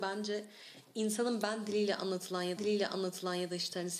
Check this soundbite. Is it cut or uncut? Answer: cut